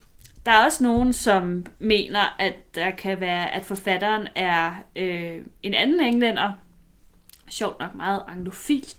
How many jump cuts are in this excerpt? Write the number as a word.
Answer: one